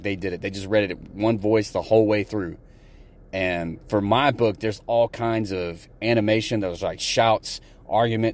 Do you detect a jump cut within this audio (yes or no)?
no